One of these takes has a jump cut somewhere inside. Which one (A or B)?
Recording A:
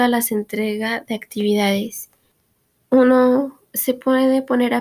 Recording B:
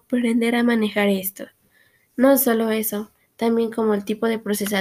A